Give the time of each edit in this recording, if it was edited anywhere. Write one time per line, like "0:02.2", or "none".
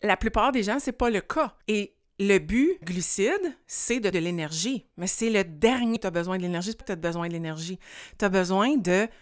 0:01.6
0:02.8
0:04.1
0:06.0
0:06.8